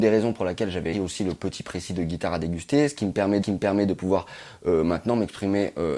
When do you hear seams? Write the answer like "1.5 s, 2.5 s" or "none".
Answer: 0.9 s, 3.4 s

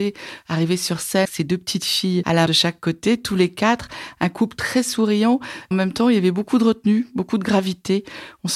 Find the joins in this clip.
1.2 s, 2.5 s, 5.7 s

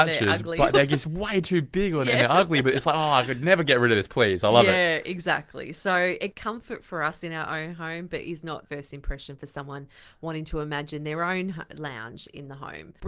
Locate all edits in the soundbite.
6.3 s, 8.7 s

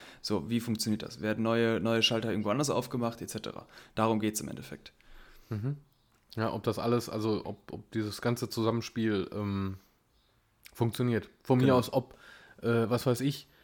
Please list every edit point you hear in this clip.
none

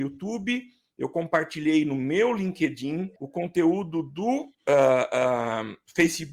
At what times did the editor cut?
3.2 s

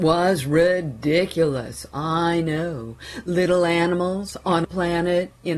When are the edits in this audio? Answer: 4.6 s

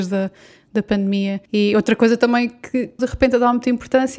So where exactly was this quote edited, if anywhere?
1.5 s, 3.0 s

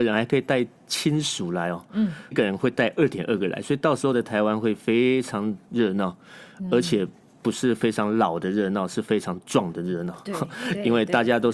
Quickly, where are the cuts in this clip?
2.3 s, 5.6 s

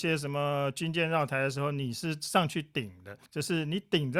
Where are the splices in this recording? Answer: 3.3 s

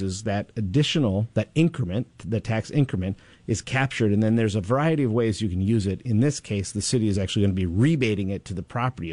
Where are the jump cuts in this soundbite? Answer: none

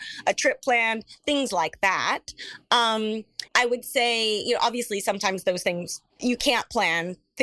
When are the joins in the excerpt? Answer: 3.5 s, 6.1 s

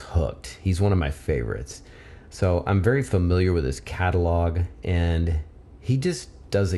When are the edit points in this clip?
none

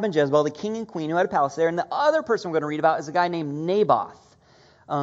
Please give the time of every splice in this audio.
none

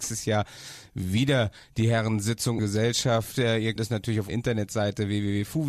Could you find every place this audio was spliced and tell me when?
2.6 s, 3.8 s, 4.3 s

